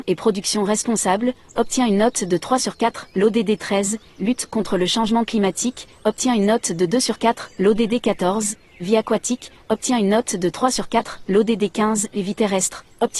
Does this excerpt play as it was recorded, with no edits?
yes; 0 cuts

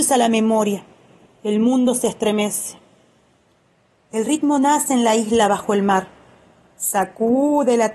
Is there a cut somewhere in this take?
no; 0 cuts

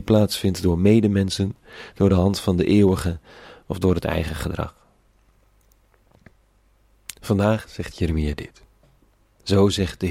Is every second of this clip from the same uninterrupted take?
yes; 0 cuts

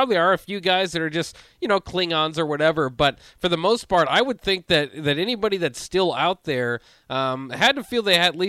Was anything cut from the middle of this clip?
no; 0 cuts

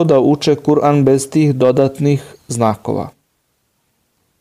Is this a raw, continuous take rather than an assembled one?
yes; 0 cuts

